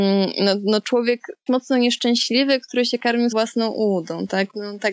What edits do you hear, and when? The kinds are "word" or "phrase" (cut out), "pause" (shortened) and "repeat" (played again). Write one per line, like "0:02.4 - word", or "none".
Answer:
0:01.5 - word
0:03.3 - word